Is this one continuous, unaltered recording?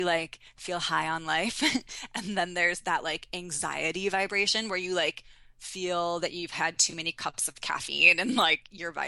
yes; 0 cuts

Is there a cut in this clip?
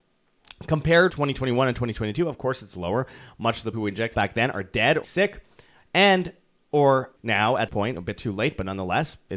yes; 7 cuts; at 1.1 s, 2.7 s, 3.7 s, 4.1 s, 5.0 s, 7.2 s, 7.7 s

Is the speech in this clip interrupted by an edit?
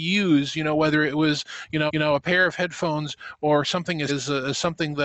yes; 2 cuts; at 1.9 s, 4.1 s

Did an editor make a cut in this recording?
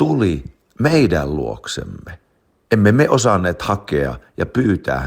no; 0 cuts

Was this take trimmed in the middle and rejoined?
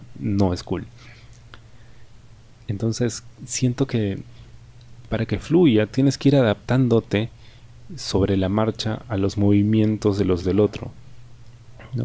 yes; 1 cut; at 10.4 s

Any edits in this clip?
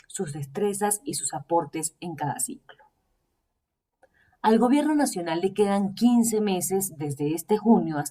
no; 0 cuts

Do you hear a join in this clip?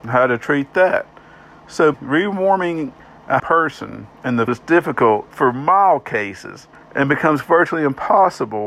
yes; 6 cuts; at 1.9 s, 3.4 s, 4.1 s, 4.5 s, 5.3 s, 6.7 s

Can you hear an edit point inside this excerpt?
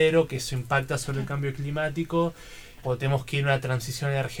yes; 1 cut; at 2.8 s

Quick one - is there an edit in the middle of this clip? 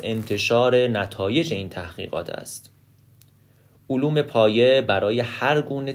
no; 0 cuts

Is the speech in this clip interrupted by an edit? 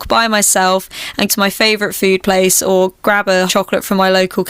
yes; 2 cuts; at 1.3 s, 3.5 s

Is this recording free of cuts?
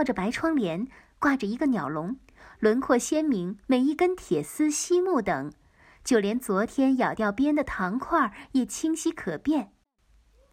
no; 1 cut; at 3.6 s

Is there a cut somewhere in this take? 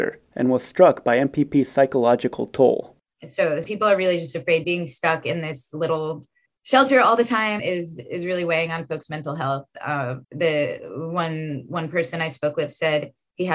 yes; 6 cuts; at 3.6 s, 4.6 s, 6.5 s, 7.6 s, 8.0 s, 10.2 s

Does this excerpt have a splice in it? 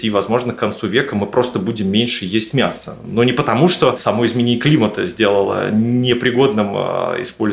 no; 0 cuts

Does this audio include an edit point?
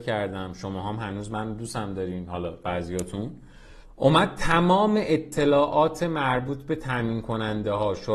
yes; 1 cut; at 3.8 s

